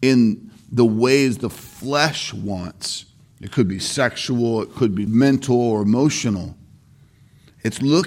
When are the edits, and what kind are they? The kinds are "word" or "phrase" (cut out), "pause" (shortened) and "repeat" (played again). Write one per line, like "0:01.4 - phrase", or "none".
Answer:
0:05.1 - phrase

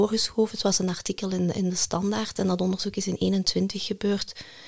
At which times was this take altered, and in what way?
none

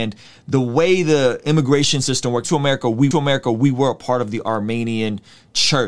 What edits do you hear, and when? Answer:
0:02.4 - phrase
0:03.1 - repeat

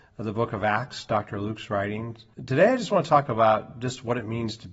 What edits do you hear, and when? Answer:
0:02.3 - pause

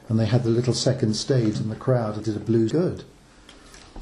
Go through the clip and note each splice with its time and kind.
0:01.5 - phrase
0:02.2 - word
0:02.7 - phrase

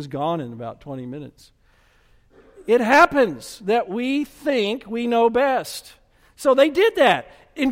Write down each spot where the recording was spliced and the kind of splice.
none

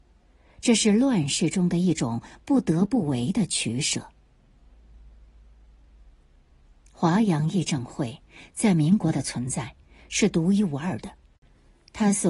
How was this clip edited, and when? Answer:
none

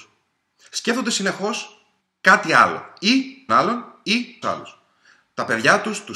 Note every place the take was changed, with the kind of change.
0:02.0 - pause
0:03.5 - word
0:04.4 - word

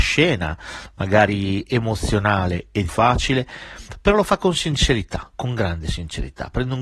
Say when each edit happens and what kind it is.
0:02.9 - word

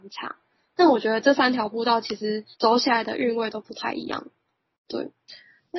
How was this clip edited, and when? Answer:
0:02.5 - pause

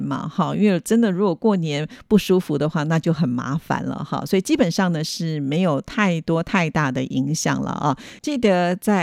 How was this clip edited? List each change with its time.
none

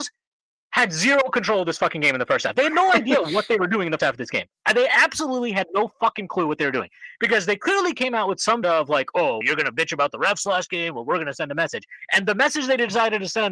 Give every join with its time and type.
0:04.0 - word
0:08.6 - word
0:09.4 - word

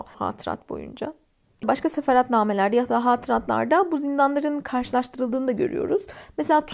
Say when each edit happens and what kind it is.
none

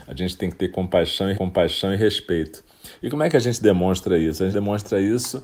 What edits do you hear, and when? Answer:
0:01.3 - repeat
0:04.5 - word

